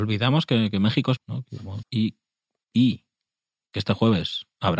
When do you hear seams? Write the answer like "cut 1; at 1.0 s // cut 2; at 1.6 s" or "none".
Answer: cut 1; at 1.2 s // cut 2; at 1.8 s